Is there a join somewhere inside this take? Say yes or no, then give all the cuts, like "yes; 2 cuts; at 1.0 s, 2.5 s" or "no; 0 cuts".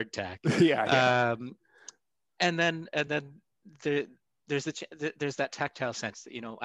no; 0 cuts